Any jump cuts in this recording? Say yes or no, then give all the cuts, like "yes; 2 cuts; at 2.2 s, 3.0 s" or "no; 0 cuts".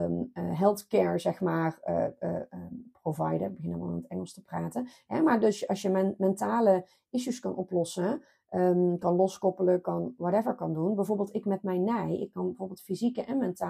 no; 0 cuts